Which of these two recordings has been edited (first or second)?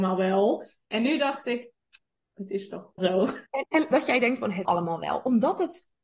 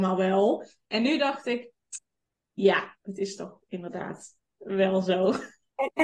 first